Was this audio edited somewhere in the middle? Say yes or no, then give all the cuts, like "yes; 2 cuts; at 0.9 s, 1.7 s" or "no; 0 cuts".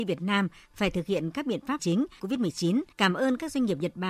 yes; 3 cuts; at 1.8 s, 2.2 s, 2.9 s